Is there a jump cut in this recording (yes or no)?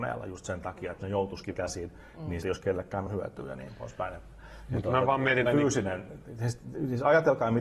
yes